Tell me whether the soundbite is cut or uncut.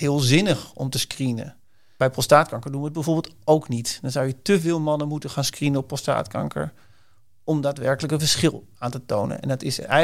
uncut